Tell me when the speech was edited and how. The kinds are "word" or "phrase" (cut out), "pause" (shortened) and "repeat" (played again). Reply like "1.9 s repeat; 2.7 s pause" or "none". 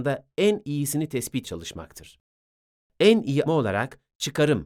1.4 s word; 3.5 s word